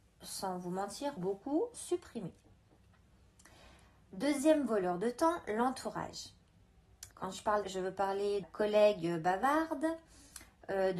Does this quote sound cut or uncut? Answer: cut